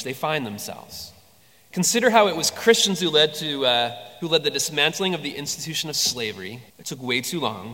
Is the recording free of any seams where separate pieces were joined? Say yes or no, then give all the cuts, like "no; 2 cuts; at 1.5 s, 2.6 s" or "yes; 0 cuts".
no; 2 cuts; at 1.4 s, 6.7 s